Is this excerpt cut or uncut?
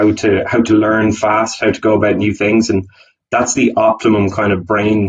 uncut